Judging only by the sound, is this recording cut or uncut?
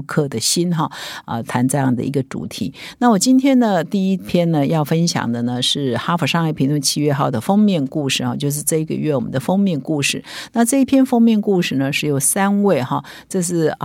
uncut